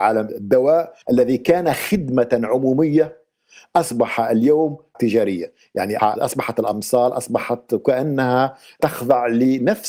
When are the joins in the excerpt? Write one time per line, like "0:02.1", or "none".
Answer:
0:01.0
0:04.9
0:06.0

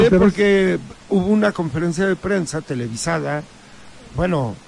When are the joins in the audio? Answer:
none

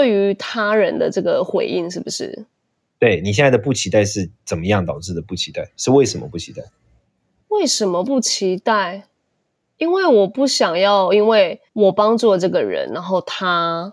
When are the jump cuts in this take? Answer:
0:11.7

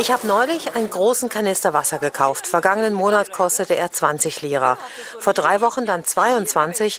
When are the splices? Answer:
none

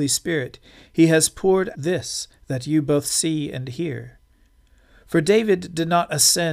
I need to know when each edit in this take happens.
0:01.7

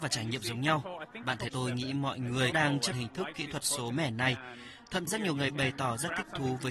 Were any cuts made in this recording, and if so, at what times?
0:01.5
0:02.5
0:02.9
0:03.9
0:05.1

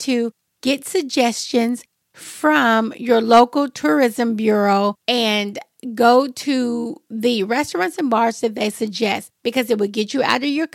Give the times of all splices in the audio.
0:05.0
0:09.3

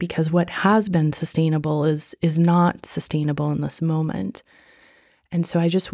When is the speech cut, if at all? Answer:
none

